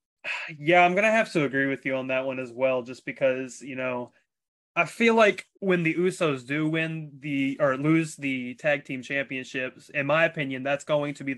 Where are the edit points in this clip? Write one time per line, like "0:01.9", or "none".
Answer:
0:05.5